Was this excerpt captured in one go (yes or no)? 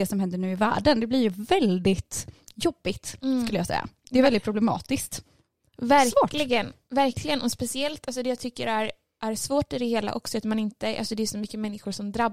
yes